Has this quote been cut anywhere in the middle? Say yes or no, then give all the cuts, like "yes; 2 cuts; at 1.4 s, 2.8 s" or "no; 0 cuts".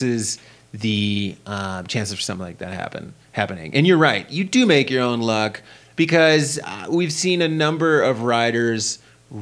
no; 0 cuts